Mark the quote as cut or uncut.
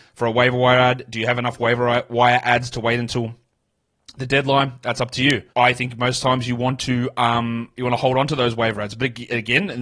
cut